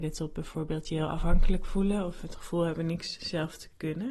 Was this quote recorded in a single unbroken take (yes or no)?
yes